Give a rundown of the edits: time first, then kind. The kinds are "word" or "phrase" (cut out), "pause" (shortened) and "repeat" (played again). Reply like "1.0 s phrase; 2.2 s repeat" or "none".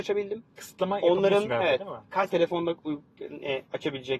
2.3 s word; 3.2 s word